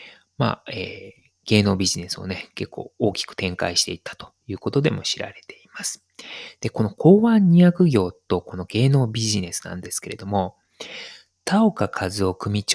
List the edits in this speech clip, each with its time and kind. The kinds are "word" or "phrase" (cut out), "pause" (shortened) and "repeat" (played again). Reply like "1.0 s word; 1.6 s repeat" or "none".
none